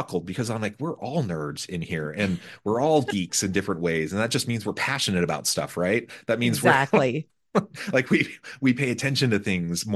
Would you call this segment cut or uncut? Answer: uncut